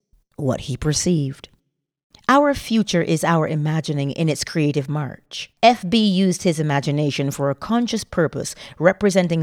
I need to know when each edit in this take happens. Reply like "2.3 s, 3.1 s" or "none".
2.0 s, 5.6 s